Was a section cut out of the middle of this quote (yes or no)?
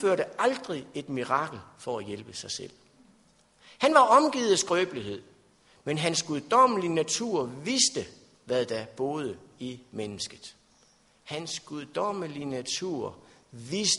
no